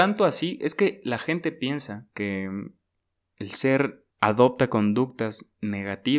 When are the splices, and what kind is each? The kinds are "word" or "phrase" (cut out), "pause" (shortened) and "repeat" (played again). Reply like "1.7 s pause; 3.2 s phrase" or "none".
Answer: 2.1 s pause; 4.1 s pause

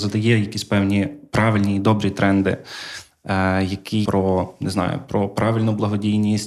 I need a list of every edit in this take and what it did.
4.0 s word

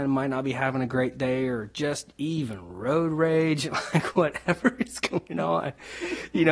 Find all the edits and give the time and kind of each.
none

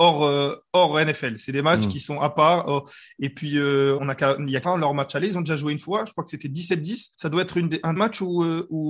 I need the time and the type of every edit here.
4.0 s word; 4.6 s word; 7.1 s pause; 8.0 s word

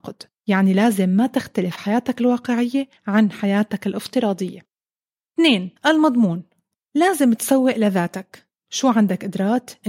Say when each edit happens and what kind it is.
3.0 s pause; 5.8 s pause

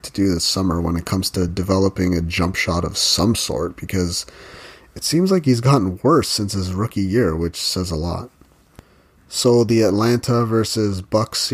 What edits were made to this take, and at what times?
none

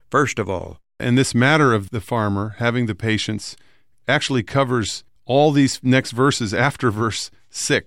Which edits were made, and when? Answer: 5.1 s pause

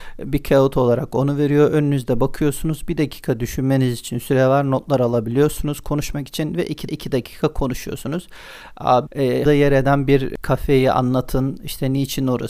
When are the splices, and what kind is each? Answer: 6.9 s repeat; 9.1 s word; 9.5 s word

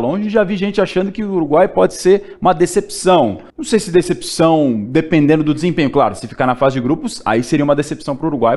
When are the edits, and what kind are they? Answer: 3.5 s pause

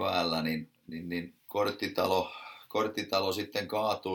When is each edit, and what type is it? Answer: 1.4 s pause

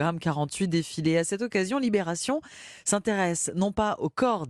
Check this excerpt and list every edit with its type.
none

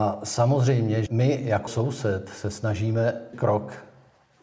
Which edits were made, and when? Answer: 1.1 s word; 1.7 s word; 3.3 s word

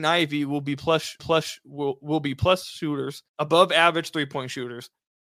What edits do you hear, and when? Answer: 1.2 s repeat; 3.3 s pause

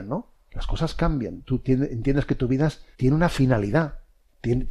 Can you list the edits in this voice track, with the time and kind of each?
2.9 s pause

